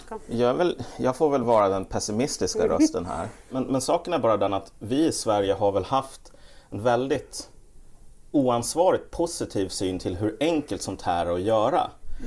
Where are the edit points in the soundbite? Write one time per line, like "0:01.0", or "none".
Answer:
none